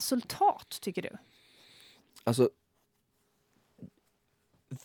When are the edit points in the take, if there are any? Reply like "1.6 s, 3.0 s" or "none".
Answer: none